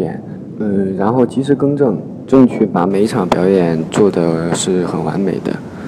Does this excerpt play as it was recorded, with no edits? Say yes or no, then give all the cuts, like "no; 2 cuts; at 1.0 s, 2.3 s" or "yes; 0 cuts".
no; 1 cut; at 2.3 s